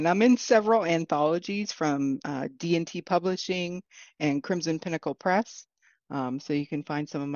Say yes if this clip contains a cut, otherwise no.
no